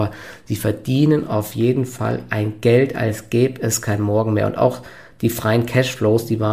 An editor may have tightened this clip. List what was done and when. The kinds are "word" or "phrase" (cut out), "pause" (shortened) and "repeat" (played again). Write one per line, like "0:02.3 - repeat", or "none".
none